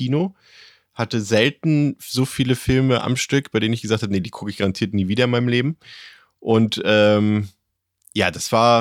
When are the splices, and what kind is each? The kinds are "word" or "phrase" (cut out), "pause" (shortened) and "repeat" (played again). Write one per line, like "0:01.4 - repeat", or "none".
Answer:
none